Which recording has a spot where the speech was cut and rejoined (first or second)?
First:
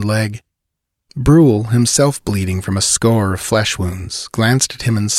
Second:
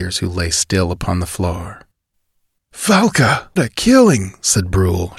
second